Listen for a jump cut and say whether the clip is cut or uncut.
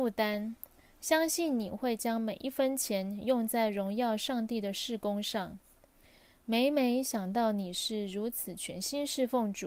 uncut